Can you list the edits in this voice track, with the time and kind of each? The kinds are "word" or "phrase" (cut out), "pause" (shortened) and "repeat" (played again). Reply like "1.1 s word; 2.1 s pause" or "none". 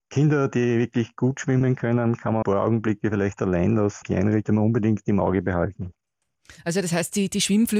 2.4 s phrase; 4.0 s word; 4.4 s phrase